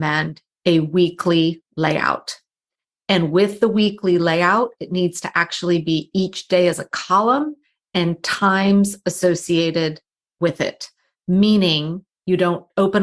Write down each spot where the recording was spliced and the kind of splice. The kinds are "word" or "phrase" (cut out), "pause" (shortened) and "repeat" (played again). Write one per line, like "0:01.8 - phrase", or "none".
none